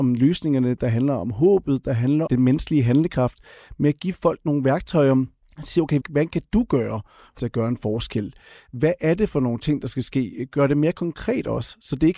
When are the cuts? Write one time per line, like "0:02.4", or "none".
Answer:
0:02.3
0:05.4
0:06.0
0:07.4